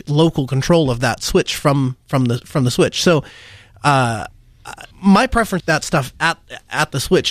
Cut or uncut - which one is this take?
cut